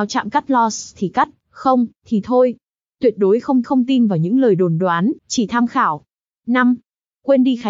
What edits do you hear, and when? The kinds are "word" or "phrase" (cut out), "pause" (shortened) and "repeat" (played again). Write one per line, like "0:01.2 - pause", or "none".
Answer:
0:02.0 - pause
0:03.6 - repeat
0:05.2 - pause